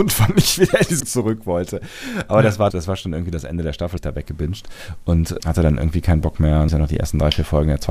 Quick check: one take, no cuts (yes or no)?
no